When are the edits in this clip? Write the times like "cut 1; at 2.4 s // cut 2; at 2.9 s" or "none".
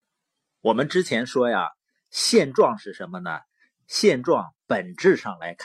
none